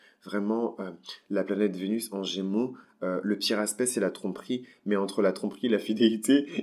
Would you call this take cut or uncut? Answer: uncut